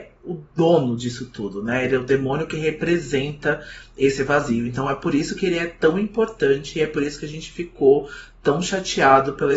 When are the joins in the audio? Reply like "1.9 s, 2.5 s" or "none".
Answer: none